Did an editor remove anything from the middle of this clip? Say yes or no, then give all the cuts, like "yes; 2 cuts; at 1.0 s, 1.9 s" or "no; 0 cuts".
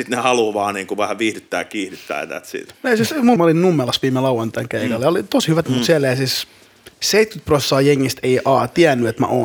yes; 3 cuts; at 3.4 s, 5.6 s, 6.9 s